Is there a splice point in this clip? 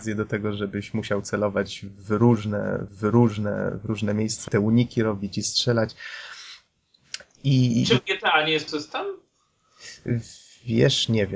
yes; 3 cuts; at 2.9 s, 4.5 s, 8.7 s

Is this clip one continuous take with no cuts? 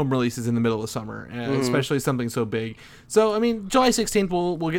yes; 0 cuts

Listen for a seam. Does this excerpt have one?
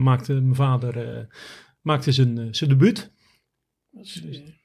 no; 0 cuts

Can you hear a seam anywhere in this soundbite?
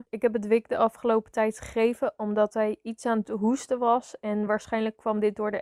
no; 0 cuts

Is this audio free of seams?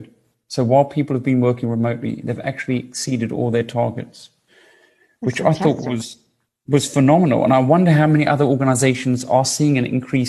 yes; 0 cuts

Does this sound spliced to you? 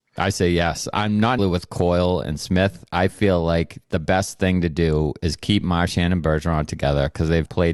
yes; 1 cut; at 1.4 s

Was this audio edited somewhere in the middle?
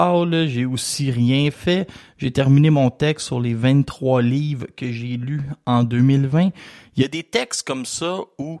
no; 0 cuts

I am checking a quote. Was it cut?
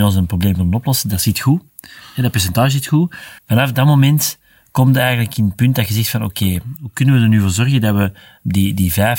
yes; 1 cut; at 3.4 s

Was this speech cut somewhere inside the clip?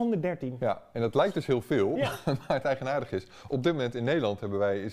no; 0 cuts

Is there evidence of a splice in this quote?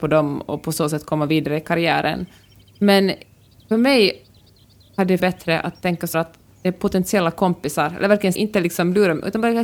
yes; 3 cuts; at 5.2 s, 6.1 s, 8.3 s

